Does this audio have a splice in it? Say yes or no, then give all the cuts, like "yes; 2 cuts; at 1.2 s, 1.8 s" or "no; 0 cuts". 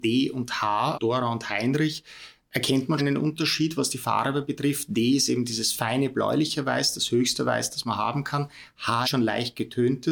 yes; 3 cuts; at 0.9 s, 3.0 s, 9.0 s